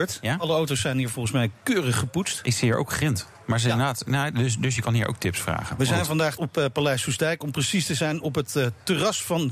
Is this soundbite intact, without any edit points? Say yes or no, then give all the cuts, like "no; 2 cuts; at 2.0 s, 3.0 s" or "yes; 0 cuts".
no; 1 cut; at 6.4 s